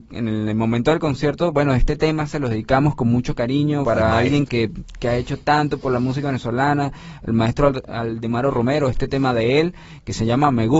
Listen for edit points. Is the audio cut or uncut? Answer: cut